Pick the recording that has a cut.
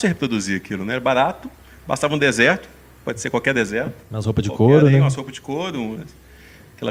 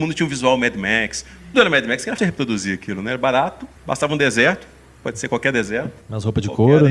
second; 3 cuts; at 1.5 s, 2.2 s, 3.8 s

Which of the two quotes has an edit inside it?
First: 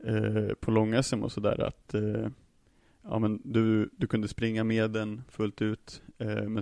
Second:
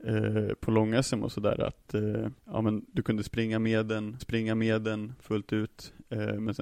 second; 3 cuts; at 2.4 s, 2.9 s, 4.2 s

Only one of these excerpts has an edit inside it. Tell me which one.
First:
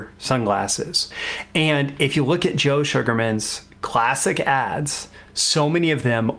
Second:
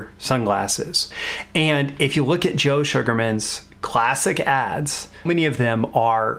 second; 1 cut; at 5.3 s

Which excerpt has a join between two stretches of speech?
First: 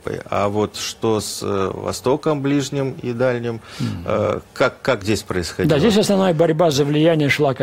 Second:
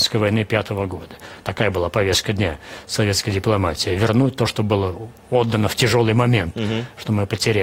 first; 1 cut; at 5.0 s

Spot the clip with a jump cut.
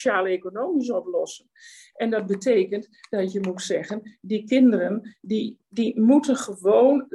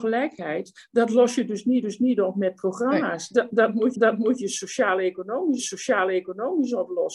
second; 3 cuts; at 1.8 s, 3.9 s, 5.6 s

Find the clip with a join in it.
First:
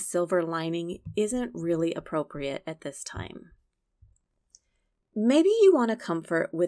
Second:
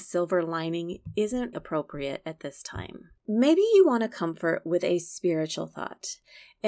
second; 2 cuts; at 1.5 s, 3.2 s

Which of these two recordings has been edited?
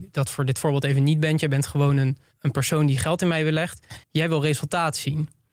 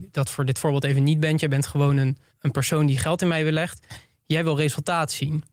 first; 1 cut; at 4.0 s

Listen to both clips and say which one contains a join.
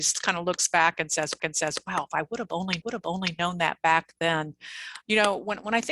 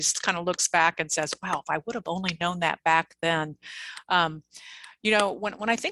first; 3 cuts; at 1.4 s, 2.8 s, 5.0 s

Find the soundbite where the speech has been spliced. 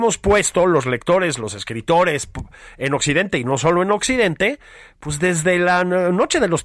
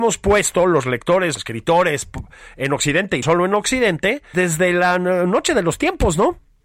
second; 3 cuts; at 1.4 s, 3.2 s, 4.3 s

